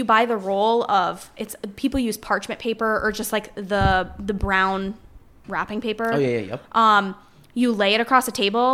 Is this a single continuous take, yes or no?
yes